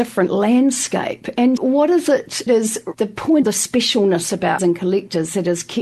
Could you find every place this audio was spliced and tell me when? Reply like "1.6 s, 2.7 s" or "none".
1.6 s, 2.5 s, 2.9 s, 3.4 s, 4.6 s